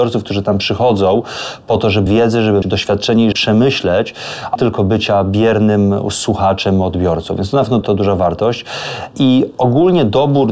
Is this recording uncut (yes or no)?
no